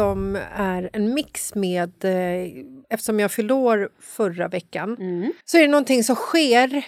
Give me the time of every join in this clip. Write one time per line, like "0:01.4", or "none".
0:02.8
0:05.4